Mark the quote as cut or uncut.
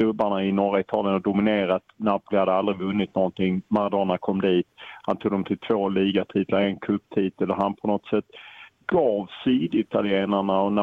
uncut